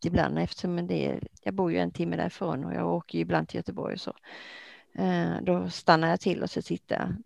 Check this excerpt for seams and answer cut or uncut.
cut